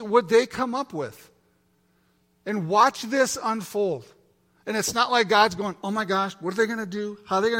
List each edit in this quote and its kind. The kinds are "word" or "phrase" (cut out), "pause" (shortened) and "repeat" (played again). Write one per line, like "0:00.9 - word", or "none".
none